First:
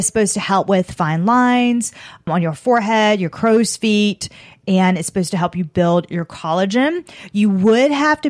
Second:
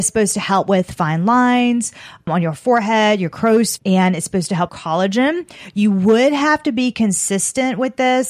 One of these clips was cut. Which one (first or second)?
second